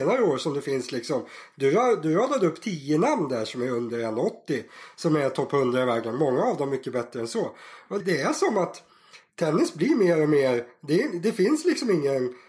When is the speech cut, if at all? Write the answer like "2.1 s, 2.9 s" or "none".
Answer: 8.0 s